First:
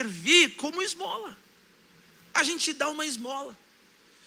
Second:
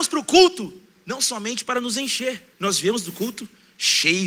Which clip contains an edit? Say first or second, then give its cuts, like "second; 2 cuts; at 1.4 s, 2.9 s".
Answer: second; 1 cut; at 2.5 s